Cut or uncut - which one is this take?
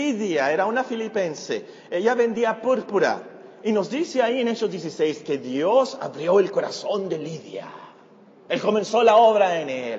uncut